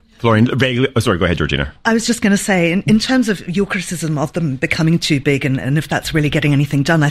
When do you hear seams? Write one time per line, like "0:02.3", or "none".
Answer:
none